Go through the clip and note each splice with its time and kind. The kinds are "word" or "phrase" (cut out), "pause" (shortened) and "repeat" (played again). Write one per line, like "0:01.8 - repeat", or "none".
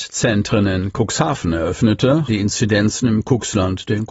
0:02.3 - word